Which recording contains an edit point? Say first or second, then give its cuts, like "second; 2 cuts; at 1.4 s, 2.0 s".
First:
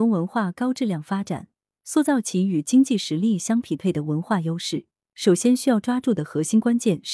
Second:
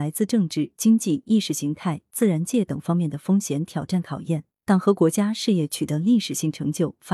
second; 1 cut; at 4.5 s